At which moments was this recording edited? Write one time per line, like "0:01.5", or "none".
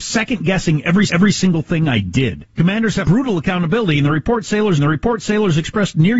0:01.1
0:02.5
0:03.0
0:04.8